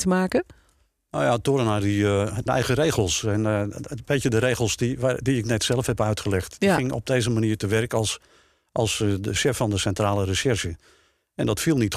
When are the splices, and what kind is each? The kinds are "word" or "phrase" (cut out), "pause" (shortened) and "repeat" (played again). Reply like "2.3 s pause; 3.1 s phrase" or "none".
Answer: 2.5 s phrase